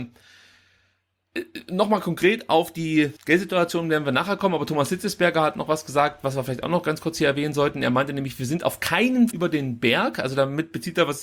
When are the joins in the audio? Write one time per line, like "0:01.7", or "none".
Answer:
0:03.2
0:09.3